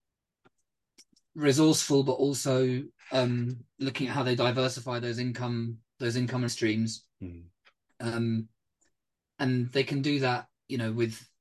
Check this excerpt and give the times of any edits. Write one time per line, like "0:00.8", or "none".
0:06.5